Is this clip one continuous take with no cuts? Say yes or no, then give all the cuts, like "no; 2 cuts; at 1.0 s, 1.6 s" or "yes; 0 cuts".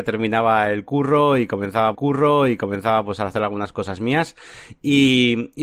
no; 1 cut; at 1.9 s